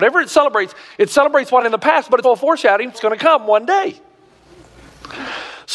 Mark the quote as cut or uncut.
cut